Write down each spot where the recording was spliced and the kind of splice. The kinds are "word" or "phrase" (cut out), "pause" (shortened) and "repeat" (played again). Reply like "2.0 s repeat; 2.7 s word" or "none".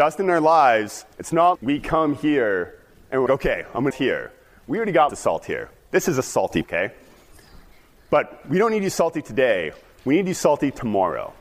1.1 s pause; 1.6 s word; 3.3 s word; 3.9 s phrase; 5.1 s word; 6.6 s word